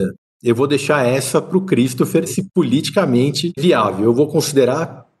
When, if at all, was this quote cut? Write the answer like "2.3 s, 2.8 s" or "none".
2.3 s, 3.6 s